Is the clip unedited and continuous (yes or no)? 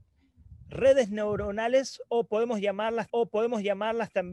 no